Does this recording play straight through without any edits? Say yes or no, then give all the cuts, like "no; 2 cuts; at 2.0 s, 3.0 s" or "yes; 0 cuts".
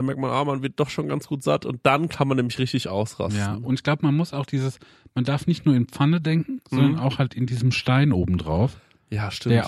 yes; 0 cuts